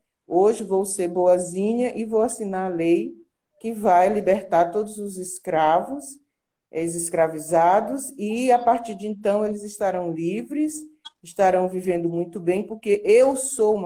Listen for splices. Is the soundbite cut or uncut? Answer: uncut